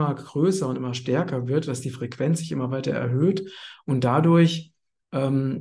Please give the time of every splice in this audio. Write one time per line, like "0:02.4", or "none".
none